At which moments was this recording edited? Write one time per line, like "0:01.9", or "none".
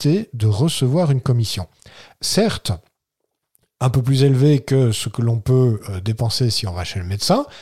none